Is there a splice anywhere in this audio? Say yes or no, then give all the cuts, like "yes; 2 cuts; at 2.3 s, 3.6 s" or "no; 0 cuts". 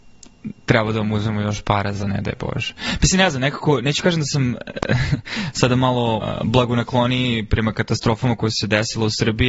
yes; 1 cut; at 6.2 s